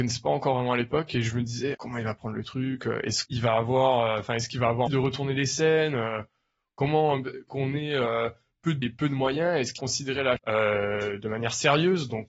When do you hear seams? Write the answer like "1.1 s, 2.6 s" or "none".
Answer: 1.7 s, 3.2 s, 4.9 s, 7.5 s, 8.8 s, 9.8 s, 10.4 s